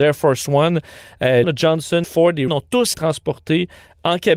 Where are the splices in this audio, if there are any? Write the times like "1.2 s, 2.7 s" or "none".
1.4 s, 2.0 s, 2.5 s, 2.9 s